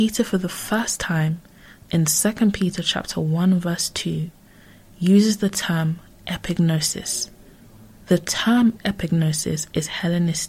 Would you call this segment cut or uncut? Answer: uncut